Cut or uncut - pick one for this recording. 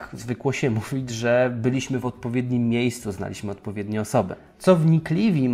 uncut